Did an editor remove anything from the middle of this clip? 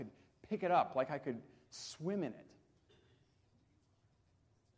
no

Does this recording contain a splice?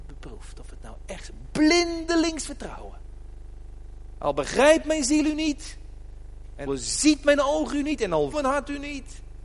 yes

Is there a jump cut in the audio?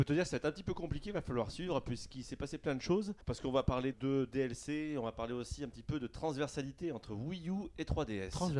yes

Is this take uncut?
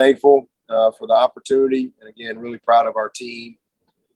yes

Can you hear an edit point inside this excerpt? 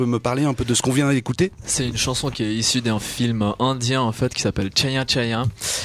no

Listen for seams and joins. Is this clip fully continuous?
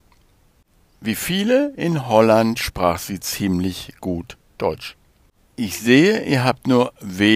no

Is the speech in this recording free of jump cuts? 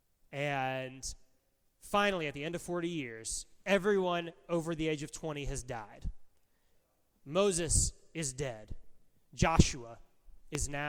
yes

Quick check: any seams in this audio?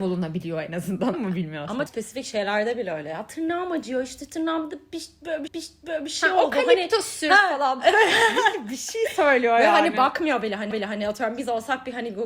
yes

